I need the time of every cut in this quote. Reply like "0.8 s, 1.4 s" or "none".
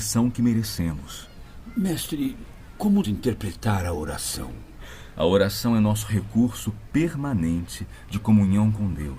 3.0 s